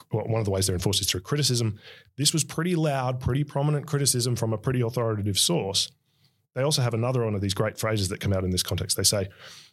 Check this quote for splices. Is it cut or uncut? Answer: uncut